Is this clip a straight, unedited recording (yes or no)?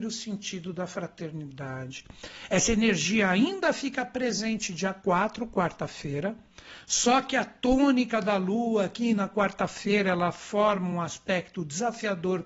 yes